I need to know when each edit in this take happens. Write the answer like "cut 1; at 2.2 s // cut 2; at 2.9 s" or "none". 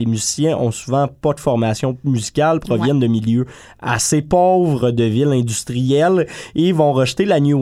none